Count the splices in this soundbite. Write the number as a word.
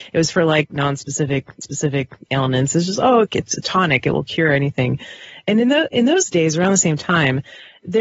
one